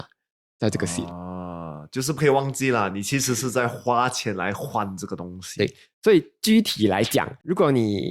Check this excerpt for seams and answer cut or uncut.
uncut